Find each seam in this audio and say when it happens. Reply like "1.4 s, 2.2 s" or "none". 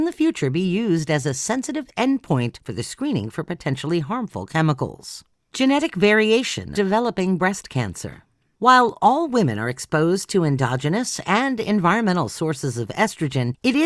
6.7 s